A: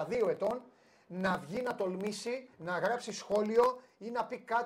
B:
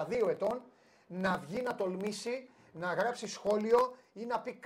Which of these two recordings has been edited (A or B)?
A